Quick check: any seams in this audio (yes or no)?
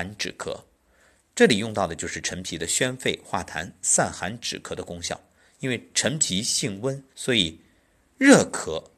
yes